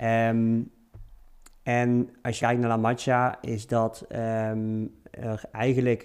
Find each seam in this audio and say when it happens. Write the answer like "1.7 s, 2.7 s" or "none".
2.4 s